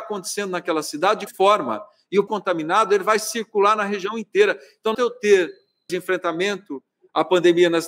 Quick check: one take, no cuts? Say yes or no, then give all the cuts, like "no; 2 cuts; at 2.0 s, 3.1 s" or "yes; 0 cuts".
no; 4 cuts; at 1.3 s, 2.3 s, 4.9 s, 5.9 s